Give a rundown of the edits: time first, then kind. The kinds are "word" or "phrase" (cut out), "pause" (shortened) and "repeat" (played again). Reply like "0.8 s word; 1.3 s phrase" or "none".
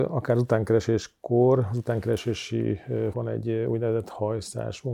3.1 s word